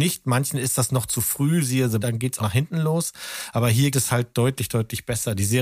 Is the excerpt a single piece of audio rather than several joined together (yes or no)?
no